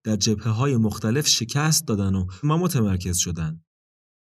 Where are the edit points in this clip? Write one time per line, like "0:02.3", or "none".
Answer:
0:02.4